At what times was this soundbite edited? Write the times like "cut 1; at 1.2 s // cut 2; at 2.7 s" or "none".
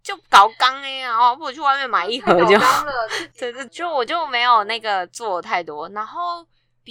cut 1; at 3.7 s

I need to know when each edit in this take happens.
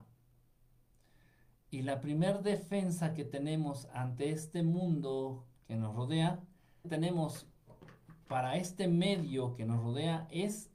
cut 1; at 5.6 s // cut 2; at 6.8 s

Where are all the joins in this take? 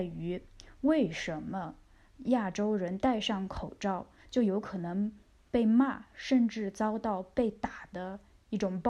none

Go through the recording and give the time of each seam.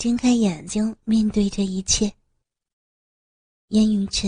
none

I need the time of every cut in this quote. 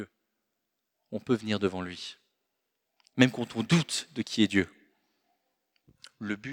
none

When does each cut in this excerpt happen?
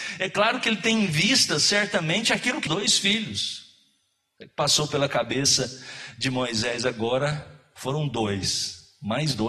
cut 1; at 2.7 s

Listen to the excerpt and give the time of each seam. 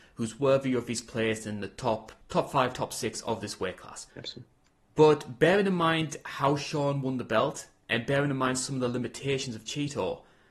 cut 1; at 2.2 s // cut 2; at 4.1 s

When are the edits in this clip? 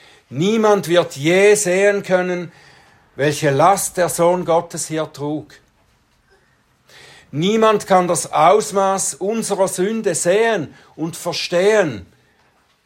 none

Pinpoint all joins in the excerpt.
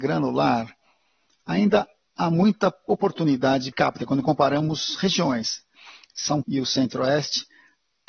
cut 1; at 3.7 s // cut 2; at 6.4 s

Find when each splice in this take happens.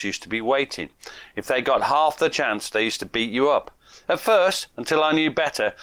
none

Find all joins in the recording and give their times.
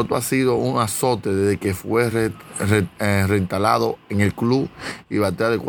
none

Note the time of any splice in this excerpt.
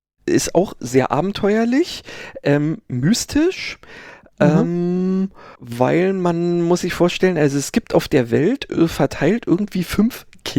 cut 1; at 5.5 s

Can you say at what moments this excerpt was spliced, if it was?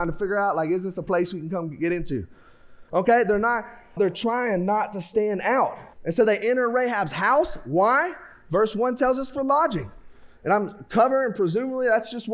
cut 1; at 4.0 s // cut 2; at 5.9 s

